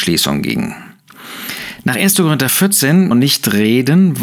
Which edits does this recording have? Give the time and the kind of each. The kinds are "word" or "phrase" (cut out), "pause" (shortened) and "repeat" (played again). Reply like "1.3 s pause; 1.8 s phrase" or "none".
3.1 s phrase

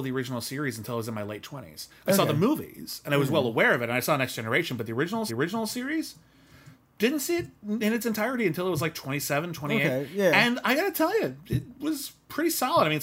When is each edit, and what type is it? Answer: 5.3 s repeat

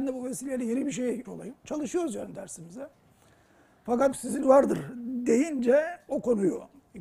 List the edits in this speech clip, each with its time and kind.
1.3 s word; 1.6 s pause; 4.1 s word; 4.4 s phrase

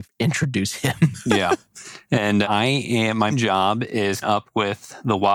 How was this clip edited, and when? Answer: 2.4 s word; 3.3 s word; 4.2 s word

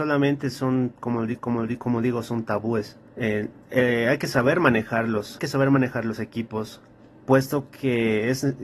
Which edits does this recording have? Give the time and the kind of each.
1.4 s repeat; 3.1 s pause; 5.4 s word; 7.0 s pause

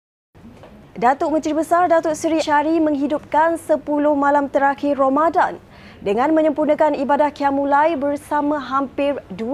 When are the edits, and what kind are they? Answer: 2.4 s word

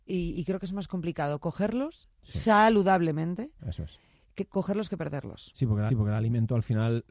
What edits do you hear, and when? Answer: 5.9 s repeat

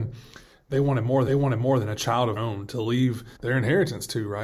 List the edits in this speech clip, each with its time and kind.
1.3 s repeat; 2.4 s word; 3.4 s pause

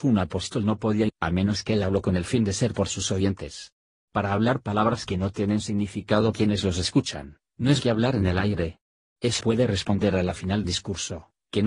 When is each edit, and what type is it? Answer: 1.1 s word; 2.7 s word; 6.3 s word; 7.8 s word; 9.4 s word; 10.6 s word

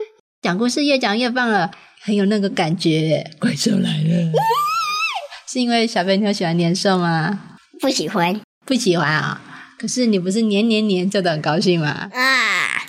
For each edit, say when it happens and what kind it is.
7.6 s pause

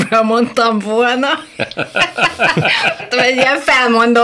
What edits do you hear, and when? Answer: 3.0 s word

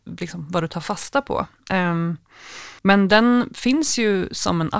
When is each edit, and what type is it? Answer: 2.8 s pause

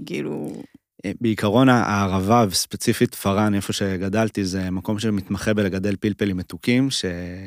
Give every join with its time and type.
none

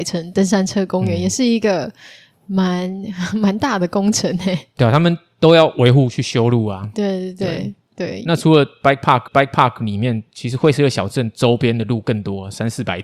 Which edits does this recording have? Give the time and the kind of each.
9.3 s repeat

